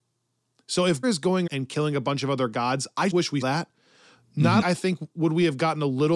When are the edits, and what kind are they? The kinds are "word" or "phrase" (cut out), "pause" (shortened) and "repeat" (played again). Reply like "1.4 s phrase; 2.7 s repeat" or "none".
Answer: 1.0 s word; 1.5 s word; 3.1 s word; 3.4 s word; 4.6 s word